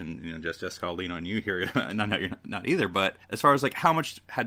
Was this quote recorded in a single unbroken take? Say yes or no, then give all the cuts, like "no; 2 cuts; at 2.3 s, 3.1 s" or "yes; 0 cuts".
no; 1 cut; at 3.2 s